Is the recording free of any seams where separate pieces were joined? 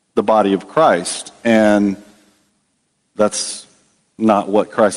yes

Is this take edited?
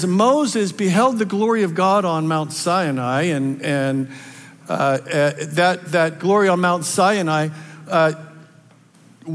yes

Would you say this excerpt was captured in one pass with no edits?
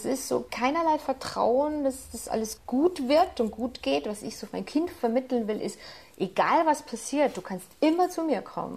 yes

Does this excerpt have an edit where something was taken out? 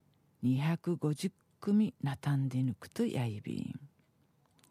no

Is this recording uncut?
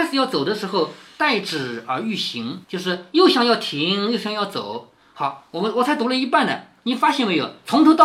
no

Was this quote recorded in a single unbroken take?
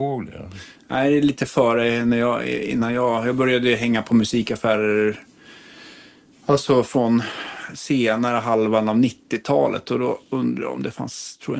yes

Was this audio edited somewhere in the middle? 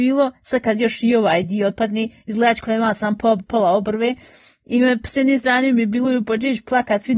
no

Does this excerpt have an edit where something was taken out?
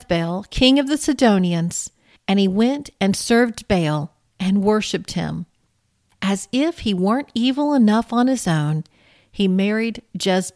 no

